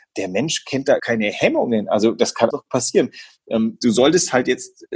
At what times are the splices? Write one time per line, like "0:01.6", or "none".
0:01.0
0:02.5

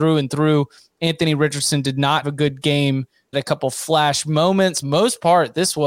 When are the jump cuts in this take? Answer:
0:02.2
0:03.3
0:04.8

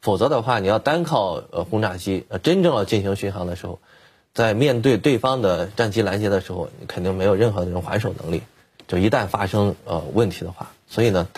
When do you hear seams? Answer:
0:02.3

